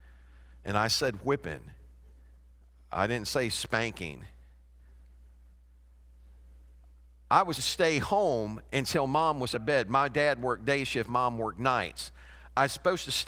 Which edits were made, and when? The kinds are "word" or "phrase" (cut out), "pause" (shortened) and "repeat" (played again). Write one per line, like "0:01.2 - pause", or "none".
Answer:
0:07.6 - word
0:09.5 - word
0:11.1 - word

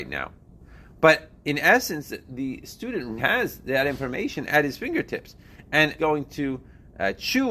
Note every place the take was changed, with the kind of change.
0:03.2 - word
0:06.0 - phrase

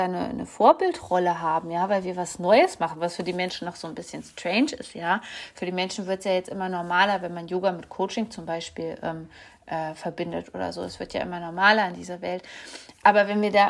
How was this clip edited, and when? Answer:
none

